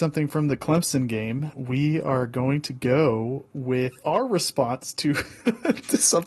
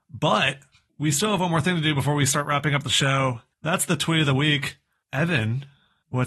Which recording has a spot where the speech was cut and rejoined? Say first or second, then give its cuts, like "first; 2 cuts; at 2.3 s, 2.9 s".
first; 2 cuts; at 1.5 s, 4.0 s